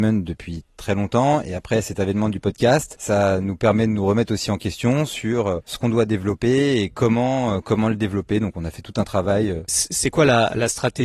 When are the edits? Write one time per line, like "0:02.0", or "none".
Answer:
none